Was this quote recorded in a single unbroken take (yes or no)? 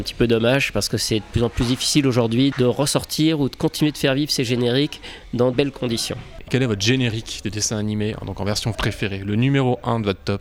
no